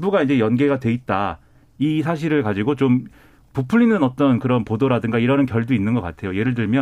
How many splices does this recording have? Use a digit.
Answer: 0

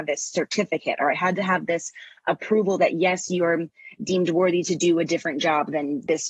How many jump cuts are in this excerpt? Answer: 0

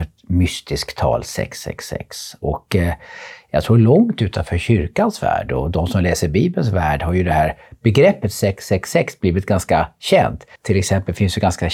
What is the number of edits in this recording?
1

